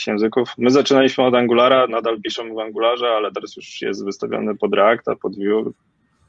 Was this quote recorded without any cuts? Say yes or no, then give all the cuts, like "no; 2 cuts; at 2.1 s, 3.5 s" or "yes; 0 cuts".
yes; 0 cuts